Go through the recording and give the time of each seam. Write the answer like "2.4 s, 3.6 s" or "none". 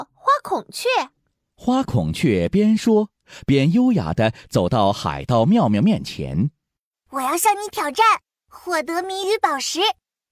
none